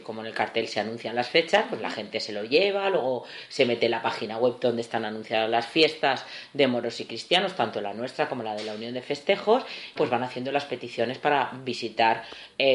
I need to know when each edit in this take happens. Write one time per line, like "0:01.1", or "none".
0:10.0